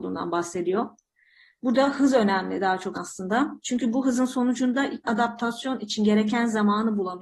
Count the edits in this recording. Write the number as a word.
two